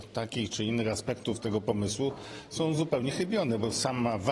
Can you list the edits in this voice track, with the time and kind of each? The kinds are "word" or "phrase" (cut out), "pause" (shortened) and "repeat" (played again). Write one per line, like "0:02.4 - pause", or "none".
none